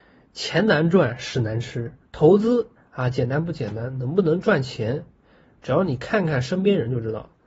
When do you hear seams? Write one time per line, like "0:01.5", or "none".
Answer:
0:02.0
0:02.7